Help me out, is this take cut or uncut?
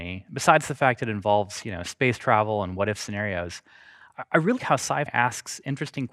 cut